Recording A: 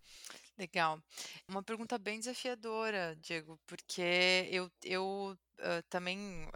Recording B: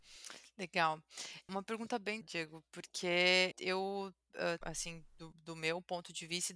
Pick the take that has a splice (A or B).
B